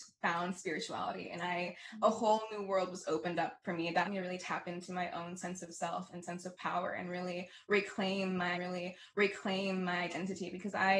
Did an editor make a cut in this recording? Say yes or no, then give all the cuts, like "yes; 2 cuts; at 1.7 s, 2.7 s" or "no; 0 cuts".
yes; 2 cuts; at 4.0 s, 8.5 s